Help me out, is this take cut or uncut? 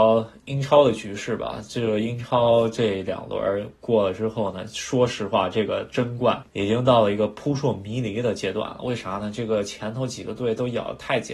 uncut